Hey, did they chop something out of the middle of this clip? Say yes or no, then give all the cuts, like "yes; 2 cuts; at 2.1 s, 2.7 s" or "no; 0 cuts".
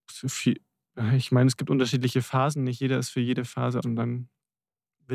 yes; 1 cut; at 3.8 s